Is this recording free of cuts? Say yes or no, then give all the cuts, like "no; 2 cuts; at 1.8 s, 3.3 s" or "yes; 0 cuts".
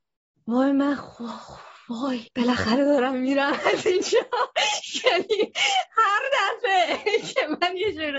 no; 1 cut; at 2.3 s